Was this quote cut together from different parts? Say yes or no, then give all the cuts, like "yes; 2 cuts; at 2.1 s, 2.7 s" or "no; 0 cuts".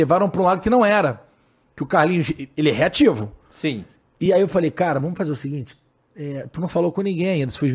no; 0 cuts